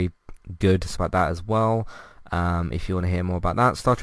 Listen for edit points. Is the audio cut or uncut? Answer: cut